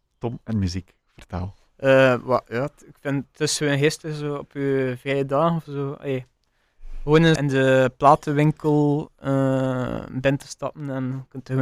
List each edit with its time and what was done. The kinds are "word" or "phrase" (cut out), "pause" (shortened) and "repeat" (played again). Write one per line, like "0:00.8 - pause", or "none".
0:07.4 - word